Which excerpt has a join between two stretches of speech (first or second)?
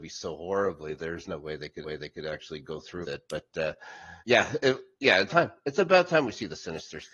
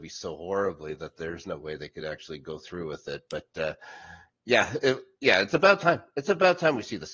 first